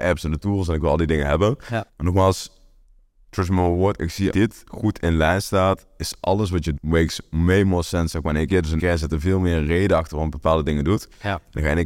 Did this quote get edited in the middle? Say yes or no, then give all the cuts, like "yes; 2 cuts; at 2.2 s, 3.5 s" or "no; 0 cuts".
yes; 4 cuts; at 1.9 s, 4.3 s, 6.8 s, 8.8 s